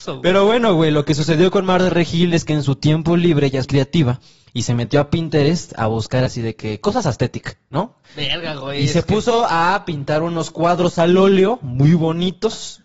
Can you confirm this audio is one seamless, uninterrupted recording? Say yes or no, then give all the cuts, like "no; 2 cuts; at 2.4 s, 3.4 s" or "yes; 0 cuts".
no; 3 cuts; at 3.6 s, 6.3 s, 8.0 s